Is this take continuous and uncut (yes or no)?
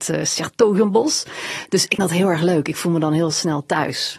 no